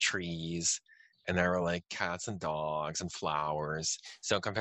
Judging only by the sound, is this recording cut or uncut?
uncut